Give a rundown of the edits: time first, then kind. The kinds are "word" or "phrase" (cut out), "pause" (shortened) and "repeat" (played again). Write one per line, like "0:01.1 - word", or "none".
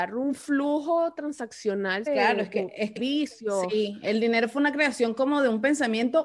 0:02.1 - word
0:03.0 - word